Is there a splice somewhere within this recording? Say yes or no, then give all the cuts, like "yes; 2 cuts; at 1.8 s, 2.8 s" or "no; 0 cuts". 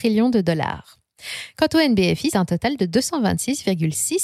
yes; 1 cut; at 2.3 s